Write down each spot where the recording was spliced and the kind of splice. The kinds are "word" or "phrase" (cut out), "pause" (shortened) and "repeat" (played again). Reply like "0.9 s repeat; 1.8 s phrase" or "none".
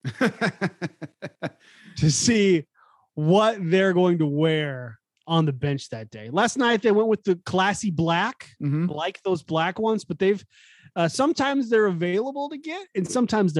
none

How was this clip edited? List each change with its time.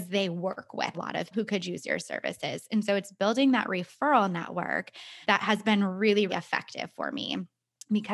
0.9 s word; 1.3 s word; 5.2 s pause; 6.3 s word

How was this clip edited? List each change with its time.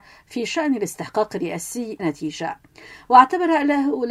2.0 s word

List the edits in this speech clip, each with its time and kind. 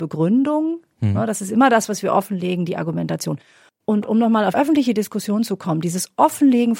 3.7 s pause; 4.5 s word

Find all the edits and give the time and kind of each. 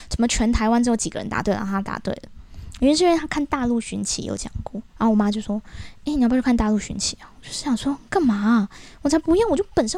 4.9 s pause

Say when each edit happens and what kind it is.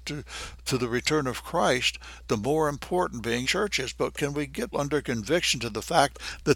3.4 s word; 4.7 s word

